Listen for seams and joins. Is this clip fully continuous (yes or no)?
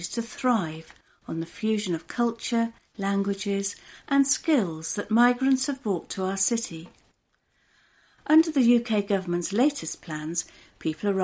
yes